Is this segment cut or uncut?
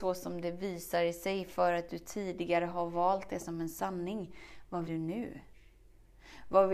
cut